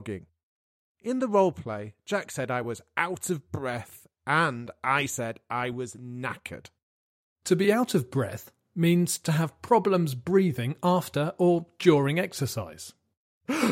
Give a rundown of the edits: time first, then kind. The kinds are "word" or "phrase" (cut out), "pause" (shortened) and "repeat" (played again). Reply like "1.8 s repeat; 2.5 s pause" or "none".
none